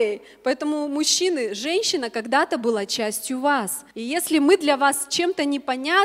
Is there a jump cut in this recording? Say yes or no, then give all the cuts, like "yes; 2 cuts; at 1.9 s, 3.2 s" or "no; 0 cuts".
yes; 1 cut; at 3.9 s